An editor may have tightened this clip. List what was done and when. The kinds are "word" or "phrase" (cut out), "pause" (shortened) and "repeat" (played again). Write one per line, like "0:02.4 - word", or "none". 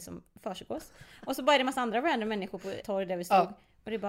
0:02.8 - word